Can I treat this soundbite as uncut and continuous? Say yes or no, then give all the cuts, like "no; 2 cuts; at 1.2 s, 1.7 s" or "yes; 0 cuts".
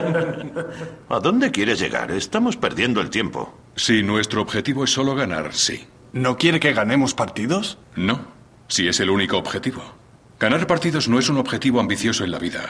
yes; 0 cuts